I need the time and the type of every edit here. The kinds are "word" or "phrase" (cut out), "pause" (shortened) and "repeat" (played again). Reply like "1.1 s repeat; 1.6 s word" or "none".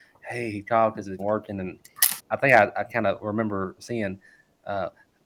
1.2 s phrase; 2.2 s word